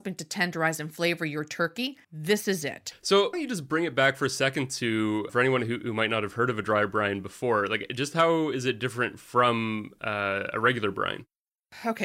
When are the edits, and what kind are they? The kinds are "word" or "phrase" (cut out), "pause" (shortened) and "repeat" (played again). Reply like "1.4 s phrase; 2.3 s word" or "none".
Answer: 2.0 s pause; 3.3 s phrase; 5.3 s word